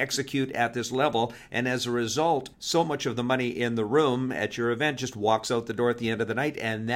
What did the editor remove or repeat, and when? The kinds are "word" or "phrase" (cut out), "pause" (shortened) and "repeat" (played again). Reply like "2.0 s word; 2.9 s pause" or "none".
2.5 s pause